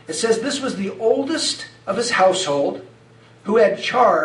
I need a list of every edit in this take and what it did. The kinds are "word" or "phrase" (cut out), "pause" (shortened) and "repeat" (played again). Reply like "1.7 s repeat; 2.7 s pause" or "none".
none